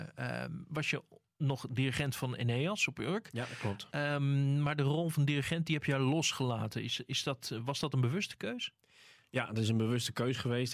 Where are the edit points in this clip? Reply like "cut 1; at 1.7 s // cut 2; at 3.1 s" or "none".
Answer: none